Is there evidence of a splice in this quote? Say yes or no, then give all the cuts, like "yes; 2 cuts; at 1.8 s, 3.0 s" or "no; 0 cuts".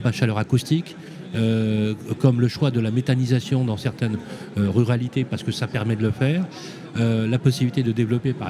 no; 0 cuts